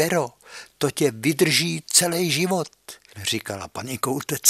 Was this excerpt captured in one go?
yes; 0 cuts

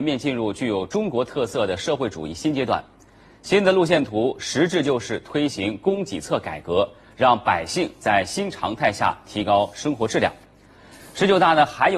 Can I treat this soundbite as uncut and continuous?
yes; 0 cuts

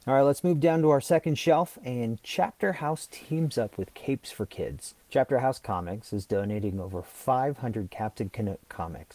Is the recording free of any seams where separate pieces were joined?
no; 1 cut; at 5.0 s

